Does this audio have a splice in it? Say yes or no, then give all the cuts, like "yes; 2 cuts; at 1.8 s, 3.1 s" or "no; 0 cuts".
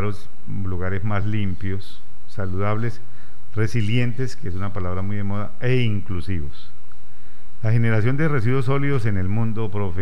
no; 0 cuts